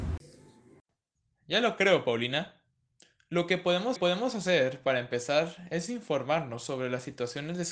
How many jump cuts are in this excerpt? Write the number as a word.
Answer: one